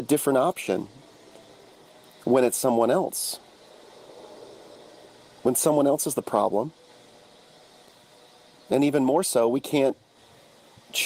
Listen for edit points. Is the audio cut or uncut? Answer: uncut